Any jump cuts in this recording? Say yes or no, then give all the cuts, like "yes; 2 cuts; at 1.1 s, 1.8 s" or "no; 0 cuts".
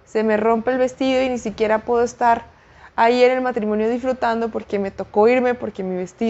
no; 0 cuts